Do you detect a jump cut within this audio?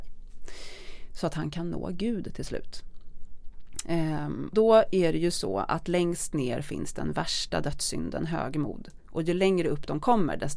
yes; 1 cut; at 4.5 s

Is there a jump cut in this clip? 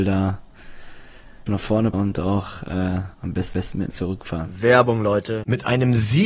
yes; 5 cuts; at 1.5 s, 1.9 s, 3.1 s, 3.5 s, 3.9 s

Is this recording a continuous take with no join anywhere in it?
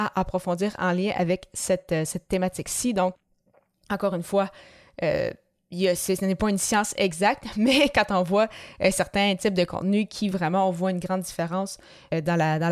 yes; 0 cuts

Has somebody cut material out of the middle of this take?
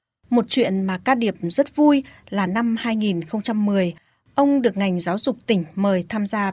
no; 0 cuts

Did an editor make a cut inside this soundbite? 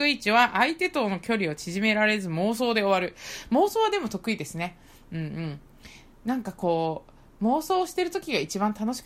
no; 0 cuts

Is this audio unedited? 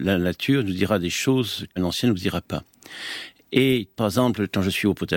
no; 2 cuts; at 1.8 s, 4.0 s

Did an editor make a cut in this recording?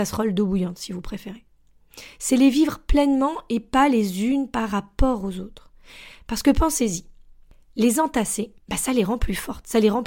yes; 1 cut; at 8.6 s

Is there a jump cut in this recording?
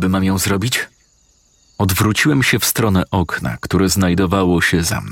no; 0 cuts

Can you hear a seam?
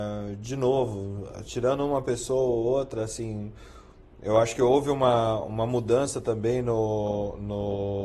no; 0 cuts

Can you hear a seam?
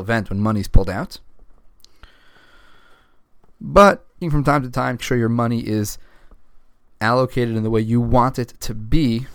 yes; 2 cuts; at 4.2 s, 5.0 s

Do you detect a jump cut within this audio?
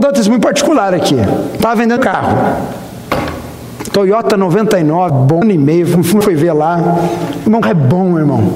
yes; 5 cuts; at 2.0 s, 5.1 s, 5.4 s, 6.2 s, 7.6 s

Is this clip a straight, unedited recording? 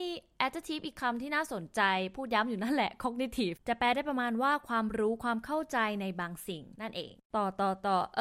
yes; 0 cuts

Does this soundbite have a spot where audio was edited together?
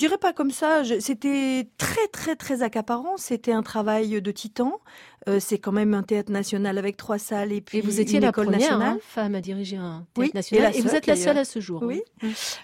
no; 0 cuts

